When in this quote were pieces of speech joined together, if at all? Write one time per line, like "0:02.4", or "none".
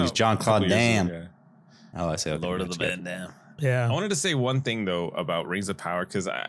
none